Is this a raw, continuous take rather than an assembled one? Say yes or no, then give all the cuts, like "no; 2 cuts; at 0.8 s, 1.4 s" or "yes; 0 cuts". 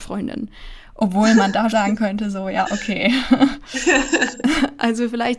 no; 1 cut; at 1.7 s